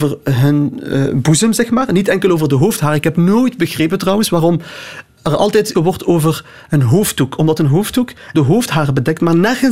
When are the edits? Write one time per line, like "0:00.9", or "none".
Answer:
0:05.7
0:08.3